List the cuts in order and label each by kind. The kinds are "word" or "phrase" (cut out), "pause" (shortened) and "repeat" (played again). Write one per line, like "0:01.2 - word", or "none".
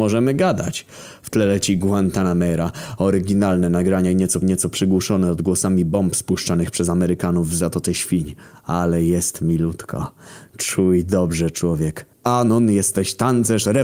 0:04.4 - repeat
0:12.1 - pause